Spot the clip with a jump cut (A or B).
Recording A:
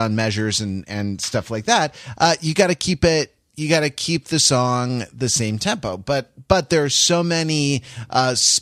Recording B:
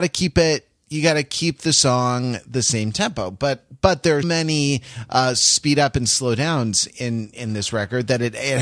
B